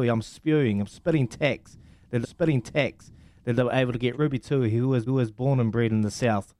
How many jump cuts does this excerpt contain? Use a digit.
3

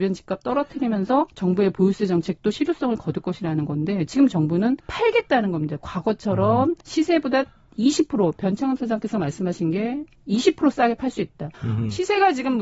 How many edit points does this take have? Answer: 4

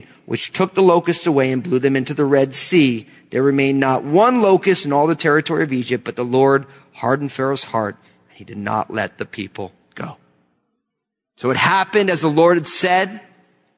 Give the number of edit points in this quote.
0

